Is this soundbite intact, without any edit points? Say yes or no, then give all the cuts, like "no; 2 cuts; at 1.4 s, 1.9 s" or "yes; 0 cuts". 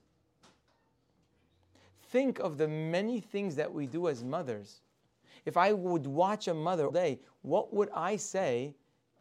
no; 1 cut; at 6.9 s